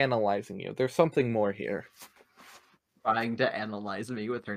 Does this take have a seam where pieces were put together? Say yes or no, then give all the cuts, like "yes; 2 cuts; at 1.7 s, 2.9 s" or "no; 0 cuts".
no; 0 cuts